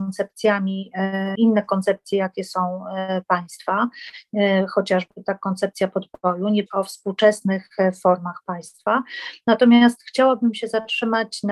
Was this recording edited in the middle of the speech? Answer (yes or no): yes